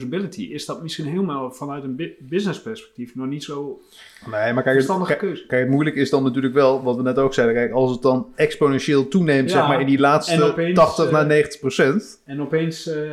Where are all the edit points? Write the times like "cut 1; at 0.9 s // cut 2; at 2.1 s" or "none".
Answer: none